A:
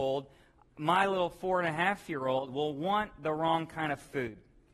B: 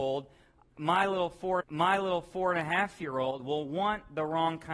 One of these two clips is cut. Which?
B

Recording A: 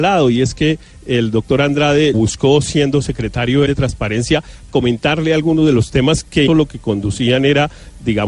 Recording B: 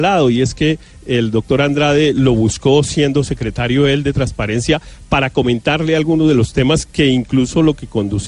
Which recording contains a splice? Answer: A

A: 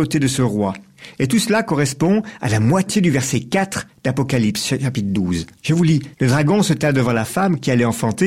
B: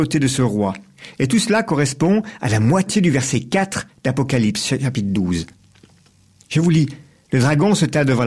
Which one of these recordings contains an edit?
A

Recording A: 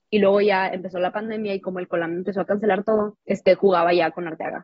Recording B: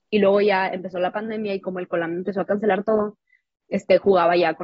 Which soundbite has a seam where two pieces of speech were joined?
A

